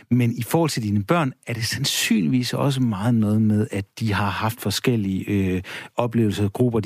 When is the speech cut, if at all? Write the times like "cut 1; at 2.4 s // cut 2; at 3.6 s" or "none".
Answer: none